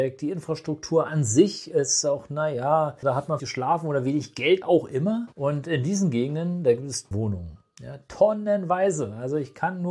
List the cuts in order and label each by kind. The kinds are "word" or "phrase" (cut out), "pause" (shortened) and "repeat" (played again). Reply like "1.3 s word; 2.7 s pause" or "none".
3.0 s word; 3.4 s word; 4.6 s phrase; 5.3 s pause; 7.1 s word